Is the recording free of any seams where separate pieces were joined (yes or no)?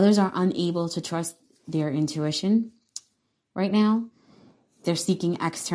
yes